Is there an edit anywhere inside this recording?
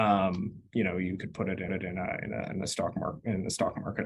yes; 1 cut; at 1.7 s

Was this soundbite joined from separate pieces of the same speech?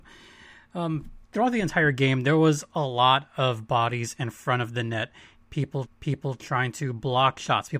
yes; 2 cuts; at 1.2 s, 5.9 s

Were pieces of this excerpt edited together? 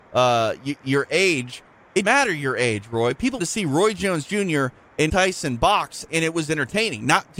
yes; 4 cuts; at 2.0 s, 3.4 s, 5.1 s, 6.1 s

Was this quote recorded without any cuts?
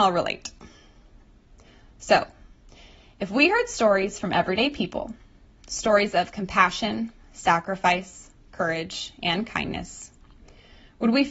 yes; 0 cuts

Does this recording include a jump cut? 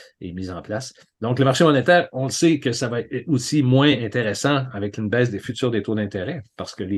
no; 0 cuts

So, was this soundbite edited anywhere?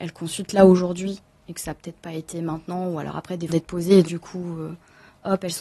yes; 2 cuts; at 3.5 s, 4.0 s

